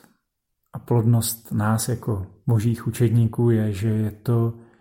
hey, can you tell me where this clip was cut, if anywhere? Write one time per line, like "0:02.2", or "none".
none